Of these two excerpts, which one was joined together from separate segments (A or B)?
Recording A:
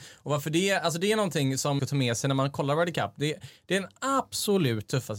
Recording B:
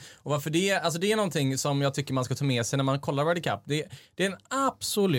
A